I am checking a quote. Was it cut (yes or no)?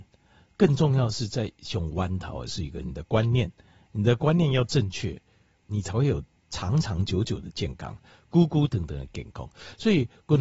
no